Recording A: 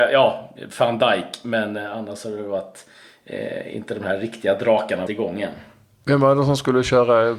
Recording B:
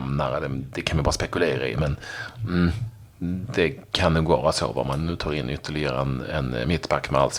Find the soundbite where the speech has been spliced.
A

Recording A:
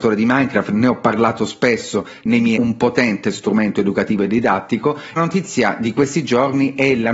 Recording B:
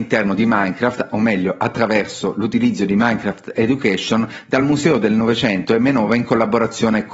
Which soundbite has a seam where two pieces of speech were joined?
A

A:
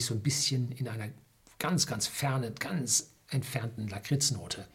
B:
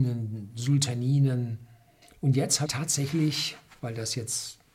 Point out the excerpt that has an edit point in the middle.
B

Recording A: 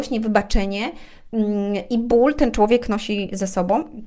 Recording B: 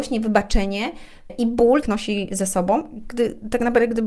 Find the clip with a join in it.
B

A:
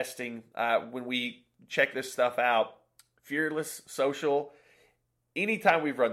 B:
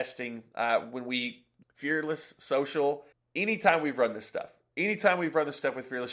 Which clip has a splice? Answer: B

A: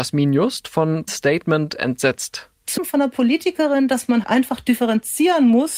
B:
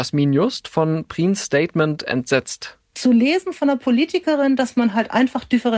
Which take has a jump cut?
A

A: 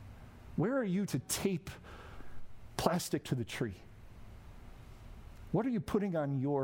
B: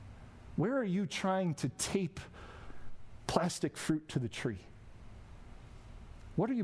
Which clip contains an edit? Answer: A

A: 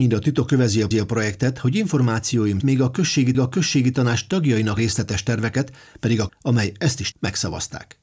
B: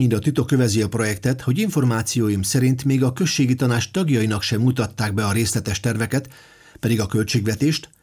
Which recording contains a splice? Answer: A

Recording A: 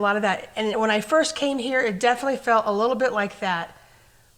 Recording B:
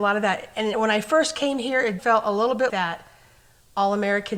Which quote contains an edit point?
B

